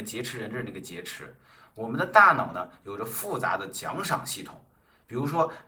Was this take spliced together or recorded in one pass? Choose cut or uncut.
uncut